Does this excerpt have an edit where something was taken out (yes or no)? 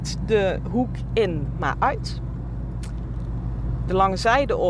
no